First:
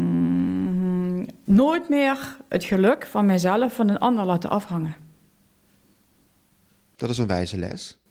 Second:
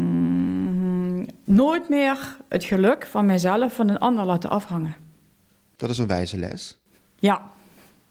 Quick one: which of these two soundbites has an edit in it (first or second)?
second